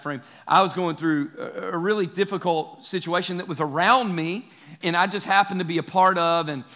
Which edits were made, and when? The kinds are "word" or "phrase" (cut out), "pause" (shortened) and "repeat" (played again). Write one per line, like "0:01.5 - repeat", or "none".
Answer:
0:04.8 - word